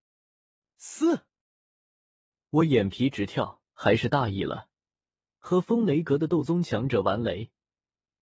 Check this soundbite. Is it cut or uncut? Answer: cut